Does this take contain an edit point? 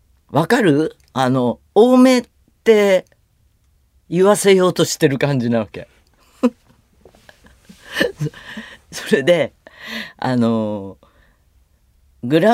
no; 0 cuts

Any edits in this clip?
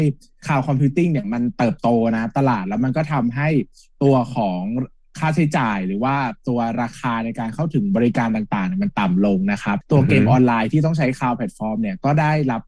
no; 0 cuts

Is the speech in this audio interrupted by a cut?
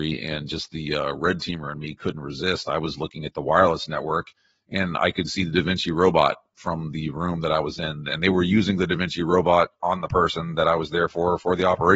no; 0 cuts

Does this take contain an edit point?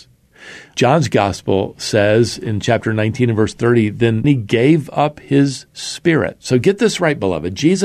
yes; 1 cut; at 4.2 s

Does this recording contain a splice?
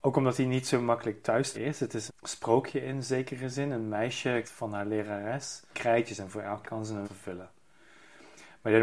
yes; 6 cuts; at 1.5 s, 2.1 s, 4.4 s, 5.7 s, 6.6 s, 7.0 s

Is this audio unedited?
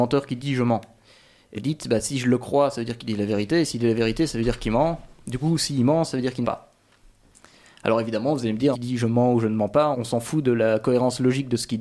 no; 4 cuts; at 1.5 s, 6.4 s, 8.7 s, 9.9 s

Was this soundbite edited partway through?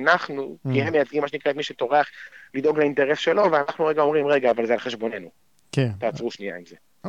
no; 0 cuts

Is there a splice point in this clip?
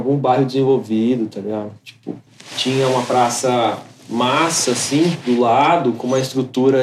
no; 0 cuts

